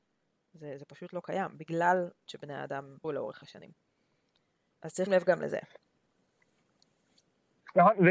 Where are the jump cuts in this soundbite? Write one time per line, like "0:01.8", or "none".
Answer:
0:02.3
0:03.0
0:05.1